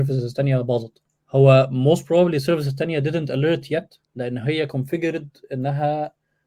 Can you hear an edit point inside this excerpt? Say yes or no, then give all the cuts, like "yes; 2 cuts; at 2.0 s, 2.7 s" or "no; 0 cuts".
yes; 2 cuts; at 1.2 s, 4.0 s